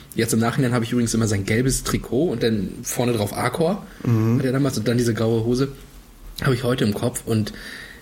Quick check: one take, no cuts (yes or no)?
yes